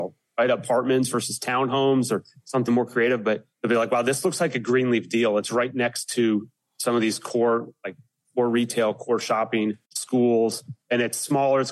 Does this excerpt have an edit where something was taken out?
yes; 3 cuts; at 2.7 s, 3.5 s, 9.9 s

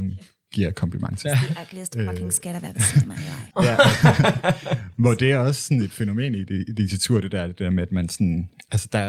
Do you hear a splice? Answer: yes; 1 cut; at 3.5 s

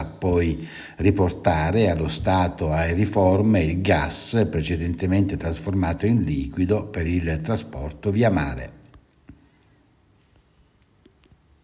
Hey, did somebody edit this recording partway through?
no; 0 cuts

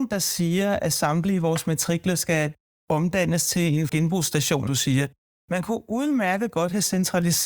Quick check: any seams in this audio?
yes; 2 cuts; at 3.9 s, 4.7 s

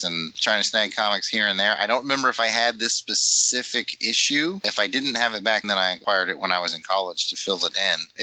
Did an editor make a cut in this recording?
yes; 1 cut; at 5.6 s

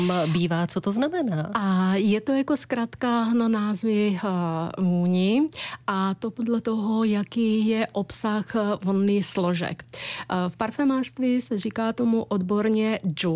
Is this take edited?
no; 0 cuts

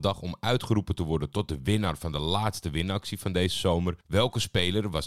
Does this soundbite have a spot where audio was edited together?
yes; 1 cut; at 4.0 s

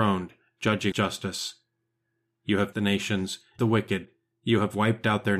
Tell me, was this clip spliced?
yes; 3 cuts; at 0.9 s, 2.7 s, 3.6 s

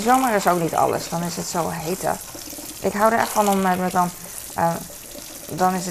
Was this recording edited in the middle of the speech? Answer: yes; 1 cut; at 3.9 s

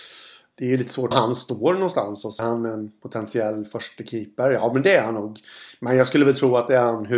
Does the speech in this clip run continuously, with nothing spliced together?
no; 2 cuts; at 1.1 s, 2.4 s

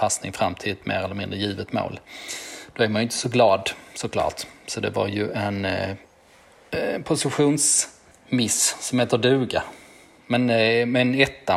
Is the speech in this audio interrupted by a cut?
no; 0 cuts

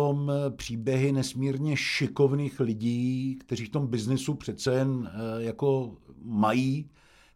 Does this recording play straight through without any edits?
yes; 0 cuts

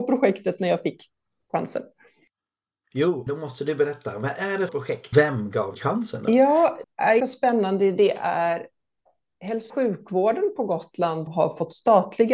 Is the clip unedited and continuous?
no; 8 cuts; at 3.3 s, 4.7 s, 5.1 s, 5.8 s, 6.8 s, 7.2 s, 9.7 s, 11.3 s

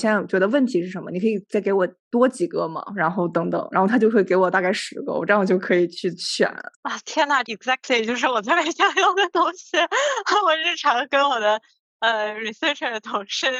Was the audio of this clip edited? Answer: yes; 2 cuts; at 6.7 s, 7.4 s

